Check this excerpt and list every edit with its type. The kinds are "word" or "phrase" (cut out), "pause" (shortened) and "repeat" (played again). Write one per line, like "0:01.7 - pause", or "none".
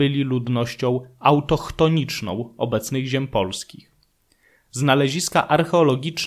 none